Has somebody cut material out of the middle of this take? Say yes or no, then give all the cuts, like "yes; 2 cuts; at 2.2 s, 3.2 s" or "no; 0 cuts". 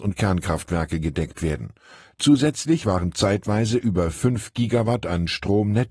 no; 0 cuts